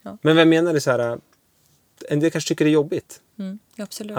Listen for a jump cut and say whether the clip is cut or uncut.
uncut